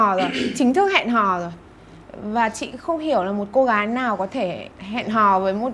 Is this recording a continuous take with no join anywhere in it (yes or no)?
no